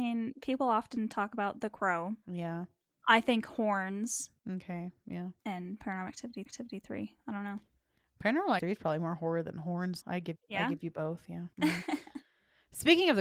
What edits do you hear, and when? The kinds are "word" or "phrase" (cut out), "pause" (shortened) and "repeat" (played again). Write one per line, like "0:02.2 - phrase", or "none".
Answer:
0:02.2 - pause
0:04.4 - pause
0:05.4 - pause
0:06.5 - repeat
0:08.6 - word
0:10.0 - word
0:10.3 - word
0:11.5 - pause